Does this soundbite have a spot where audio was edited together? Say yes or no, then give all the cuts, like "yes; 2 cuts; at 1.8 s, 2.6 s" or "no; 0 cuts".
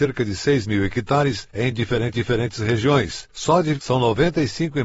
yes; 2 cuts; at 2.1 s, 3.8 s